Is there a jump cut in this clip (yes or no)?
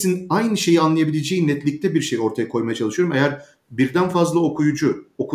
no